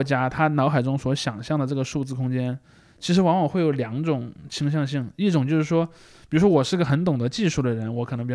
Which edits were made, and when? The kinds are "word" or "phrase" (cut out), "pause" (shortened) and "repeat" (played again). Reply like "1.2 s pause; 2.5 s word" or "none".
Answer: none